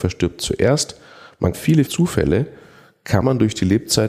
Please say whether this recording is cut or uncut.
cut